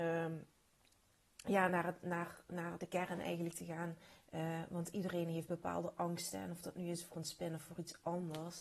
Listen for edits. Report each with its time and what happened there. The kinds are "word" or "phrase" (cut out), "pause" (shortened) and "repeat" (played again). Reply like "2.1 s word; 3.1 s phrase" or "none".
none